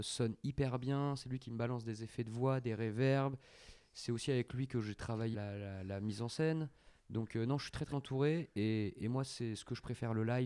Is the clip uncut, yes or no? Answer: no